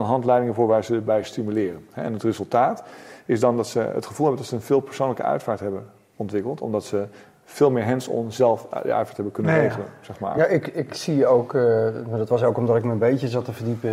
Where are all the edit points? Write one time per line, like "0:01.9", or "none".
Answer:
none